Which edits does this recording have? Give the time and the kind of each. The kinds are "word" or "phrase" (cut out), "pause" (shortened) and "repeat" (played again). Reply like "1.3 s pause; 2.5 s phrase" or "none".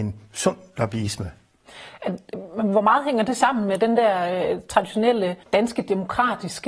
5.4 s pause